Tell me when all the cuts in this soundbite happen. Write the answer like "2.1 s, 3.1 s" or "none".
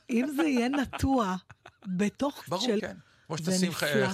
2.5 s, 2.8 s